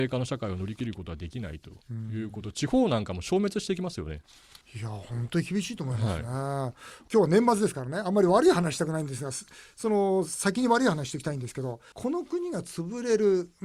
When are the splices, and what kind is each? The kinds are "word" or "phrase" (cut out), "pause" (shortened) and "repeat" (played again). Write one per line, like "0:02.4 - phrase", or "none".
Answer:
0:04.6 - pause
0:11.9 - pause